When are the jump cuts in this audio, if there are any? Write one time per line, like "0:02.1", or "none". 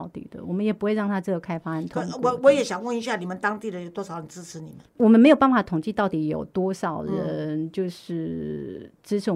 0:04.9

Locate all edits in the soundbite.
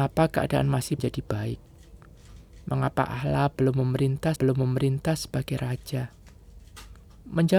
0:01.0
0:04.4

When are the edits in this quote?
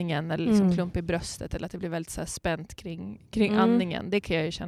none

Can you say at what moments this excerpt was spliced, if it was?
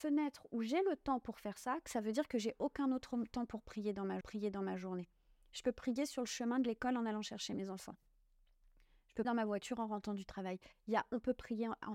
0:04.2
0:09.2

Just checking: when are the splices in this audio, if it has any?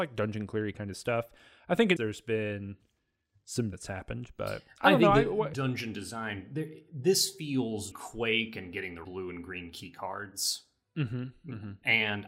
0:02.0
0:03.7
0:05.5
0:07.9
0:09.0

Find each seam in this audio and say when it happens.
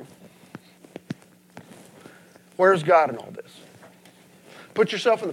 none

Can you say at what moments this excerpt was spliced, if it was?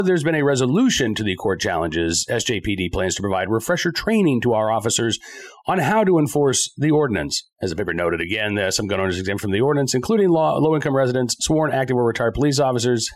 0:07.5

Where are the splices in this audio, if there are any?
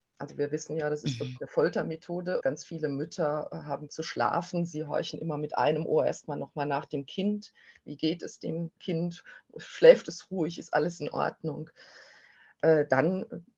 0:02.4
0:03.9
0:08.8

